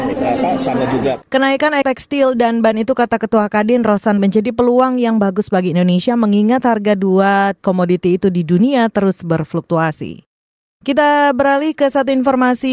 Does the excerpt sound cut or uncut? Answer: cut